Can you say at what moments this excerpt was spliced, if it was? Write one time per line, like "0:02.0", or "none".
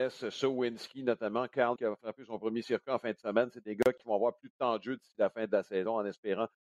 0:01.8